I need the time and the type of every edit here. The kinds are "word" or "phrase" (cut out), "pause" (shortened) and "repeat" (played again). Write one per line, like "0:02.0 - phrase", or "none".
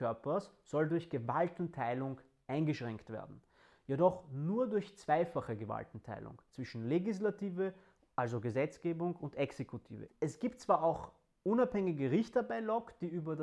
none